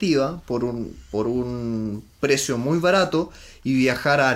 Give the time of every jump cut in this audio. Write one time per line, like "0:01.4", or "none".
none